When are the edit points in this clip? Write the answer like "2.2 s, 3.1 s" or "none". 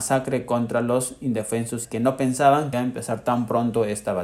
1.8 s, 2.7 s